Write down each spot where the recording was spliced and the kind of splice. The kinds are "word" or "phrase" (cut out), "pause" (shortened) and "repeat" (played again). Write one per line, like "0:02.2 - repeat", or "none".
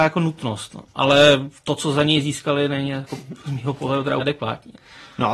0:04.2 - word